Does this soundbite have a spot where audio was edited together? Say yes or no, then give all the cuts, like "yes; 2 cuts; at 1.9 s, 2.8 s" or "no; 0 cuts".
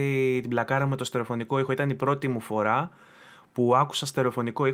no; 0 cuts